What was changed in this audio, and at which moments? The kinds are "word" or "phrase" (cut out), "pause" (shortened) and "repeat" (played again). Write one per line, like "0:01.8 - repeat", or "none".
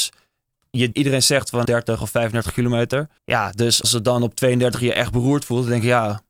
0:00.9 - phrase
0:01.6 - phrase
0:03.2 - pause
0:03.8 - word